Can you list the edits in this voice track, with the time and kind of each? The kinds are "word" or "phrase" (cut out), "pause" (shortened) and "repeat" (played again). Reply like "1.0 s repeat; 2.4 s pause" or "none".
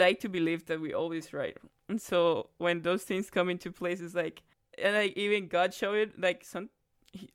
1.7 s pause